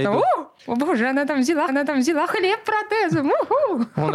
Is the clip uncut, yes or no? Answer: no